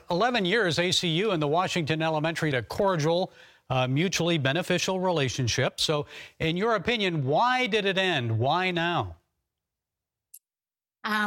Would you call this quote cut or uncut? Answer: cut